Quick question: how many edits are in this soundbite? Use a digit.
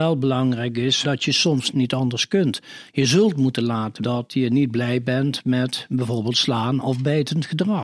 3